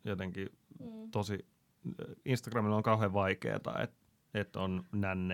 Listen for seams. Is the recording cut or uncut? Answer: uncut